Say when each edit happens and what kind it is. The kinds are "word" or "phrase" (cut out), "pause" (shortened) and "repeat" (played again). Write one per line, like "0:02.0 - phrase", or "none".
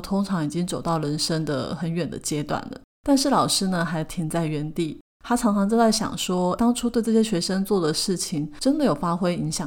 0:06.6 - word